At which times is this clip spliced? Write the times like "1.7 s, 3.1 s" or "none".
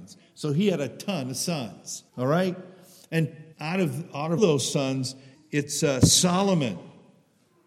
2.1 s, 3.5 s, 4.4 s, 5.3 s